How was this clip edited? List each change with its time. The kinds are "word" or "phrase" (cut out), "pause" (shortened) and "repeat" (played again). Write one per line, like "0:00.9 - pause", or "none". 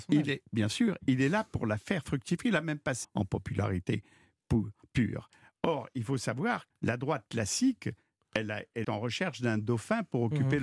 0:03.0 - word
0:06.7 - word
0:08.8 - word